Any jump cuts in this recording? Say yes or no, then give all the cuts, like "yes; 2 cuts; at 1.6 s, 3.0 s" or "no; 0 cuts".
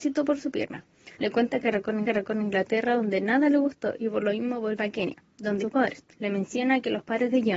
yes; 4 cuts; at 1.1 s, 2.0 s, 5.6 s, 6.1 s